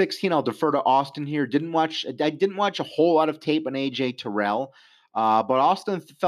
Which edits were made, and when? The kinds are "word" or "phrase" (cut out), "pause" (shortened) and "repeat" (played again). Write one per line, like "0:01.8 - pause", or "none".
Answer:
none